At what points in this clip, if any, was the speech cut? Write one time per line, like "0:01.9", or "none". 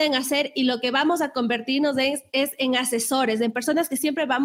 none